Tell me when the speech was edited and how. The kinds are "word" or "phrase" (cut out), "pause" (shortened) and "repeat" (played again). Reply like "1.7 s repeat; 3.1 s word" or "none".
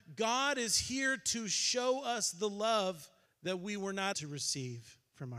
3.3 s pause; 4.1 s word